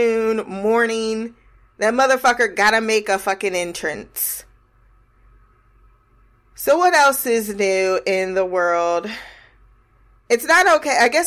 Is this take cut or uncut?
uncut